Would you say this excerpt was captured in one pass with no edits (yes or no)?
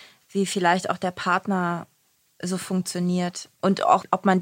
yes